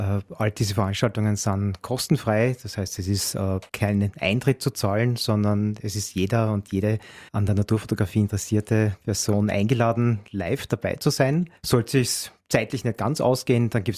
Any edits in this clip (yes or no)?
yes